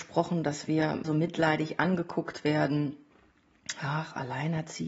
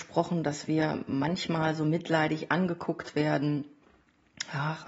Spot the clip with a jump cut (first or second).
first